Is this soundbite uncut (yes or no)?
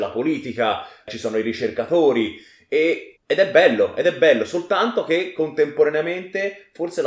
no